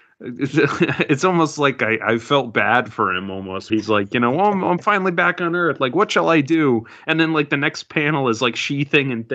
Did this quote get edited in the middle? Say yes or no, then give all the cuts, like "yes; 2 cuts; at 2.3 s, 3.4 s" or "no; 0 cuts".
yes; 1 cut; at 3.7 s